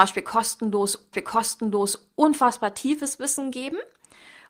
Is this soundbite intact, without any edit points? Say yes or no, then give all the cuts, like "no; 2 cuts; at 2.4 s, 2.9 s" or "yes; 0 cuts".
no; 1 cut; at 1.1 s